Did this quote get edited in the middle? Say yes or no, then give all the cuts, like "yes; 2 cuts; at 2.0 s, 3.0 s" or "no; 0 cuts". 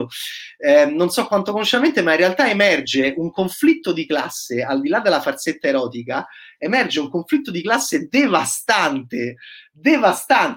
no; 0 cuts